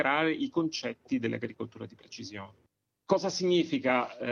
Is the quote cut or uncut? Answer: uncut